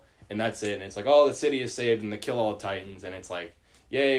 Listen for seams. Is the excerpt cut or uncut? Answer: uncut